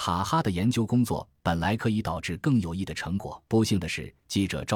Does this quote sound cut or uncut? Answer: cut